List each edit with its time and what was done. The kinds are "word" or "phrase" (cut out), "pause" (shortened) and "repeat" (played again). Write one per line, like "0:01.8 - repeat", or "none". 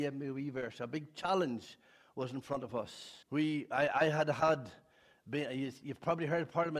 0:03.2 - pause